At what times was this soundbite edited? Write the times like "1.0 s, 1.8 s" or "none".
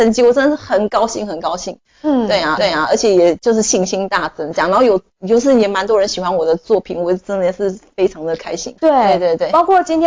2.6 s, 8.8 s